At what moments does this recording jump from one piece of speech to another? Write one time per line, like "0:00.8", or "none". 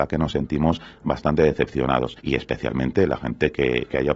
0:02.2